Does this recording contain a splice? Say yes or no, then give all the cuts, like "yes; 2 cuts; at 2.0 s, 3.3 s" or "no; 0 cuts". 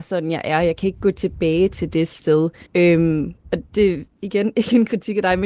yes; 2 cuts; at 2.7 s, 3.7 s